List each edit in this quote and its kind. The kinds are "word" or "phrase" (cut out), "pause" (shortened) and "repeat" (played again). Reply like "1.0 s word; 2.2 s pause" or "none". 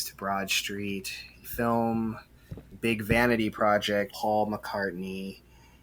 1.4 s word; 2.7 s word; 4.1 s phrase